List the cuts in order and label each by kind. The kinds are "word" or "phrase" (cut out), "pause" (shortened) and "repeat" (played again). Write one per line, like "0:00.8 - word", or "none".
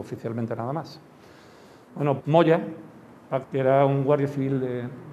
0:02.2 - word
0:03.4 - word